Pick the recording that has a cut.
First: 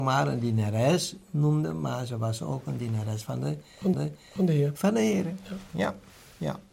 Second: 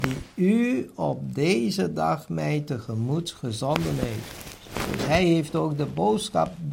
first; 1 cut; at 3.9 s

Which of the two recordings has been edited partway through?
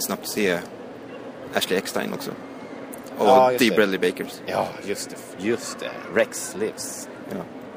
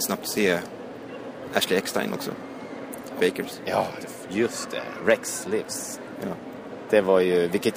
second; 2 cuts; at 3.2 s, 4.0 s

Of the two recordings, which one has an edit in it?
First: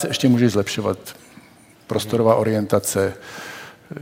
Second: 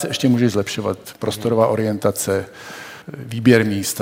second; 2 cuts; at 1.2 s, 3.0 s

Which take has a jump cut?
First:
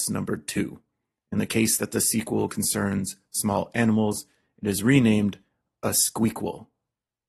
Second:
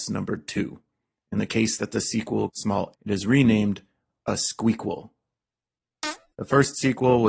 second; 2 cuts; at 2.5 s, 2.9 s

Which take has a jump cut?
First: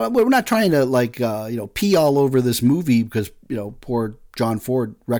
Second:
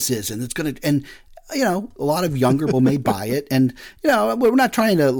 second; 1 cut; at 2.7 s

